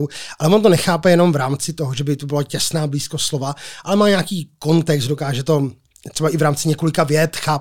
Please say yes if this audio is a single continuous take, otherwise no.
yes